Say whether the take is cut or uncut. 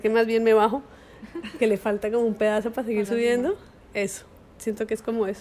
uncut